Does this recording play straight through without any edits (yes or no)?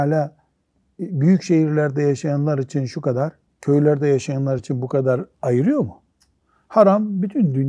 yes